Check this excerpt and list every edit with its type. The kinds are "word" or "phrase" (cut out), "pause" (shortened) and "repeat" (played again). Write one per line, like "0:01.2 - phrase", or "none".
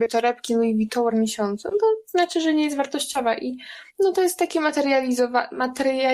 0:01.1 - word
0:03.9 - pause